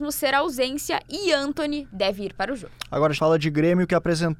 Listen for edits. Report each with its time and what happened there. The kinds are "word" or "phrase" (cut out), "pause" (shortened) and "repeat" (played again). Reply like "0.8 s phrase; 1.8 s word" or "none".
3.2 s word